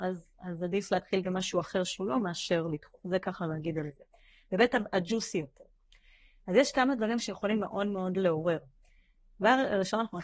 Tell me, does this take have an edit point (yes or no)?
no